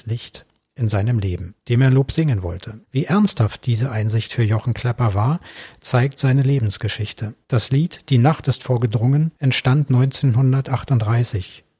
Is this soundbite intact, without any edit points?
no; 4 cuts; at 1.6 s, 2.8 s, 7.4 s, 9.4 s

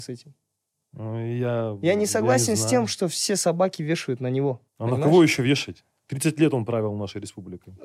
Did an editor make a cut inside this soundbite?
yes; 1 cut; at 4.7 s

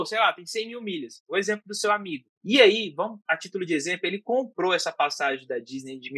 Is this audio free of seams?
no; 1 cut; at 2.4 s

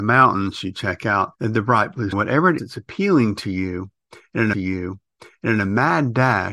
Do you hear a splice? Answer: yes; 4 cuts; at 1.4 s, 2.1 s, 2.6 s, 4.5 s

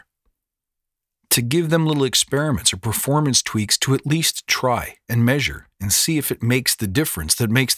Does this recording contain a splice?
no; 0 cuts

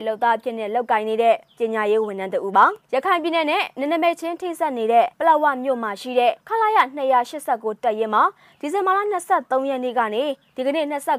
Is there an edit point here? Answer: yes; 3 cuts; at 2.8 s, 5.1 s, 6.4 s

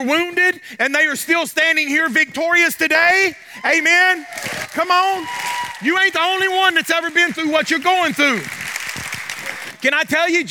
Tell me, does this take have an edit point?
no; 0 cuts

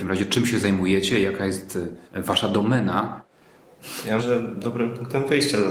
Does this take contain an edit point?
yes; 2 cuts; at 2.1 s, 4.2 s

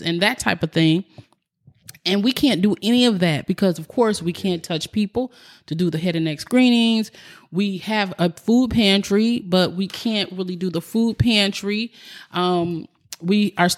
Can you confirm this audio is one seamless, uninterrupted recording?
yes; 0 cuts

